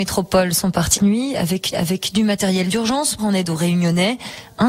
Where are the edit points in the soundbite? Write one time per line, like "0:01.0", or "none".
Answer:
0:01.0
0:01.7
0:03.2